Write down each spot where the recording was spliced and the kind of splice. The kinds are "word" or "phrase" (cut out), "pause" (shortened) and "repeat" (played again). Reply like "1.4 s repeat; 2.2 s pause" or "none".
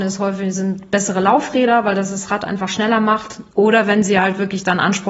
3.5 s pause